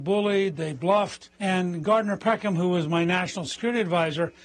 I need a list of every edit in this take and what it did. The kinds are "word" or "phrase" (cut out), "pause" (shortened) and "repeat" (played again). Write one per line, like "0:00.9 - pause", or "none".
0:01.3 - pause